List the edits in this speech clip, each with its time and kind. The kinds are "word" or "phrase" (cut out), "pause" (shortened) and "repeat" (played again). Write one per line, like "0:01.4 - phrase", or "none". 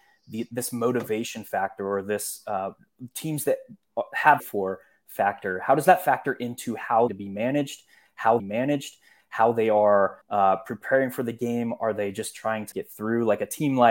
0:04.4 - phrase
0:07.1 - phrase
0:08.4 - repeat
0:10.2 - pause
0:12.7 - word